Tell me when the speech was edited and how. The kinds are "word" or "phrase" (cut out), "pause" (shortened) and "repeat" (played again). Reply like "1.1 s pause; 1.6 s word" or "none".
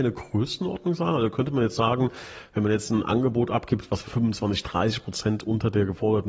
4.0 s word

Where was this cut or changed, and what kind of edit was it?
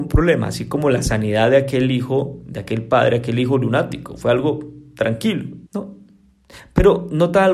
5.7 s pause

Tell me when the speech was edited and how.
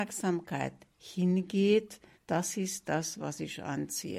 2.1 s pause

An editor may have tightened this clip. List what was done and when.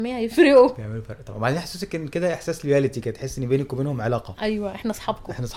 none

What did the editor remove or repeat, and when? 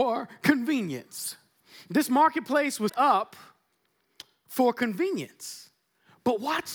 2.9 s word

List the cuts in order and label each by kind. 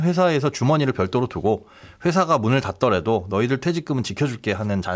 none

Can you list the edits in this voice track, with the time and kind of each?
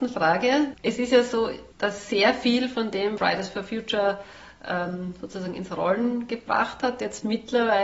3.2 s word

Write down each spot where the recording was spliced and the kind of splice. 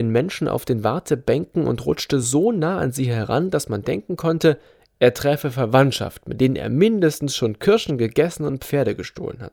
none

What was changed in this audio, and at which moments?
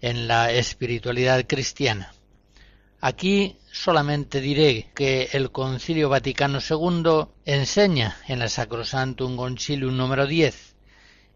4.9 s word

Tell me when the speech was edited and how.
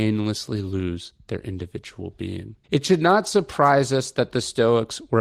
2.6 s pause

